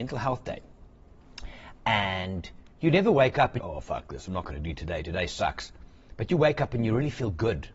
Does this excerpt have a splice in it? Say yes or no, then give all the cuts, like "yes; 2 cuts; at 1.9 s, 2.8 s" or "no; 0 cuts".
yes; 2 cuts; at 2.7 s, 3.6 s